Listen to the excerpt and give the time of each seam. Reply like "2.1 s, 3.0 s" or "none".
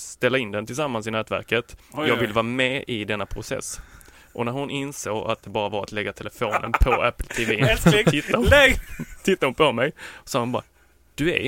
none